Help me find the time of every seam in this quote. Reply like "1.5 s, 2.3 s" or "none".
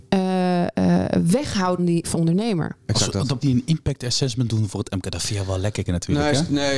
1.8 s, 2.1 s, 3.4 s, 4.5 s, 5.9 s